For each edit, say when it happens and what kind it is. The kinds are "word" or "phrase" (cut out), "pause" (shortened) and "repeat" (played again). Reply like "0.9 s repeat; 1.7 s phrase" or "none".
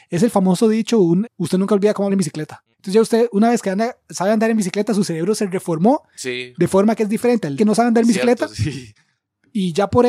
1.3 s word; 2.1 s word; 2.7 s pause; 7.6 s phrase

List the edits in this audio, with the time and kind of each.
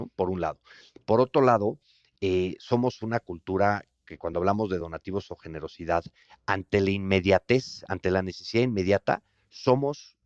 none

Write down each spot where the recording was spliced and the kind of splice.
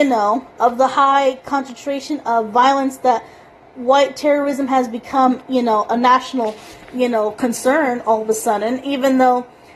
none

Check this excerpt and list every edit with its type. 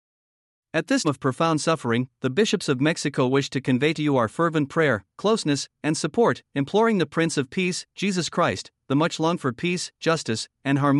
1.0 s word

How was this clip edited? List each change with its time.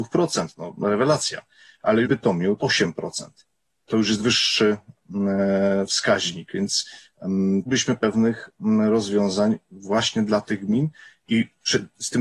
2.0 s word; 2.6 s word; 3.9 s word; 4.2 s word; 7.7 s word; 8.0 s word

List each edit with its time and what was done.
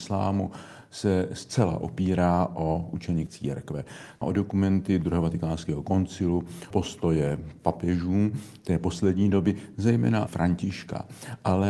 3.3 s word; 4.2 s word; 6.7 s word; 10.3 s word

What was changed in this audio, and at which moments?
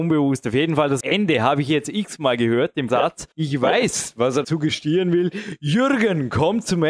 1.0 s word; 2.9 s word; 3.3 s pause; 4.4 s word

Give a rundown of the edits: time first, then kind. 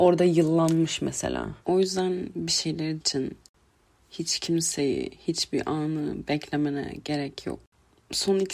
1.6 s pause; 3.0 s word

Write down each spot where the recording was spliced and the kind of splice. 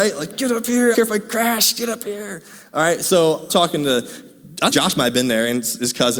0.9 s word; 3.5 s word; 4.7 s word

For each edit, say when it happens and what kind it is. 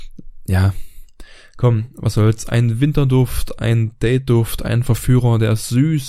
none

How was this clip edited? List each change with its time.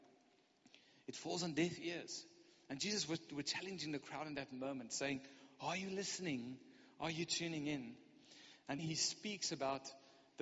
8.8 s word

